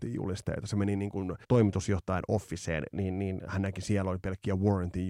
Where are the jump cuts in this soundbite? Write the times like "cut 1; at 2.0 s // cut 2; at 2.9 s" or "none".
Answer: cut 1; at 1.4 s